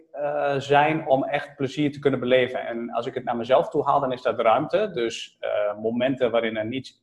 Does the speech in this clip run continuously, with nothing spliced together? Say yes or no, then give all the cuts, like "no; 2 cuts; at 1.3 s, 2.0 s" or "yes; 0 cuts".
yes; 0 cuts